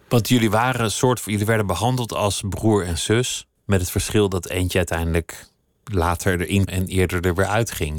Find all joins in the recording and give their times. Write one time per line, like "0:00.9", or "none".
0:03.5
0:06.7